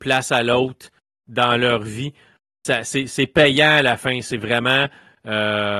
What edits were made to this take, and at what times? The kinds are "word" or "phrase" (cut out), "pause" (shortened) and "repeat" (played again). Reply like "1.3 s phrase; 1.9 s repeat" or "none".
none